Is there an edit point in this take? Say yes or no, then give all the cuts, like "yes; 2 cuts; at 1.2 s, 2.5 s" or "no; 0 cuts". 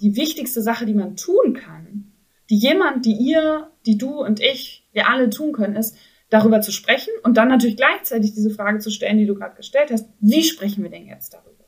no; 0 cuts